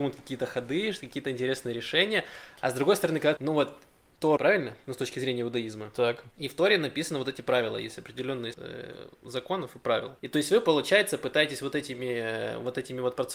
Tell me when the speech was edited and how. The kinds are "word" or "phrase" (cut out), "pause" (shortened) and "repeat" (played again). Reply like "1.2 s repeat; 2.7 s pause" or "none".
3.4 s phrase; 4.4 s phrase; 6.3 s pause; 8.5 s word; 10.2 s pause

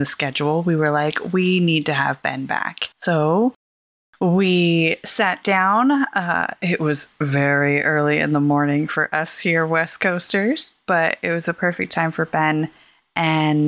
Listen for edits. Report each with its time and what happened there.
2.9 s pause

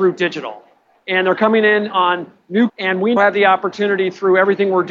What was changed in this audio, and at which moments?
2.7 s word; 3.2 s word

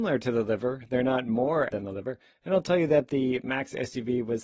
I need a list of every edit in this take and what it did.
1.7 s word

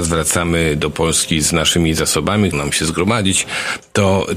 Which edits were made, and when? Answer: 2.5 s phrase

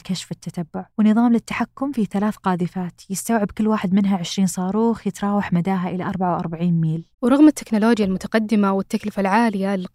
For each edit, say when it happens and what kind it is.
0.9 s pause; 7.1 s pause

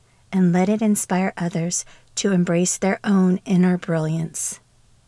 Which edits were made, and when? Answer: none

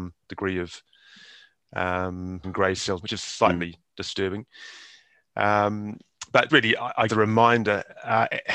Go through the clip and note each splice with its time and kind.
2.4 s word; 3.0 s word; 6.5 s word; 7.1 s word

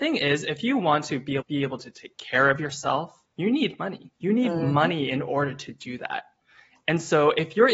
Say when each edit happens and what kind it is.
1.4 s phrase; 3.3 s pause; 4.2 s pause

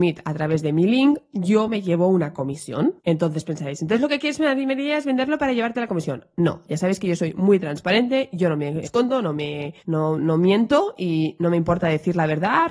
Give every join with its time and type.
3.0 s pause; 8.8 s phrase; 9.8 s pause

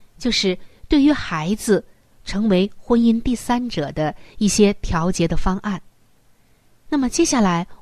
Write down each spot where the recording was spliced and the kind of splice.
none

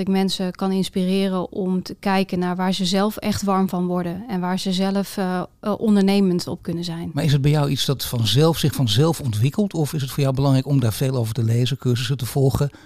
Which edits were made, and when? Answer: none

